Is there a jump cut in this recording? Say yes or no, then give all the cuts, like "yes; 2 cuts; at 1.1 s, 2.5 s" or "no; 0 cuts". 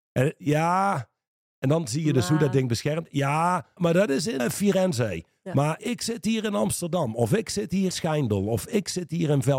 yes; 4 cuts; at 3.8 s, 4.4 s, 5.8 s, 7.9 s